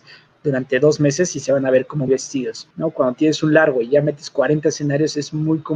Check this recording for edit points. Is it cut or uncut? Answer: cut